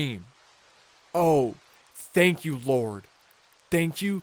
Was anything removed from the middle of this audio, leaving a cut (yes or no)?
no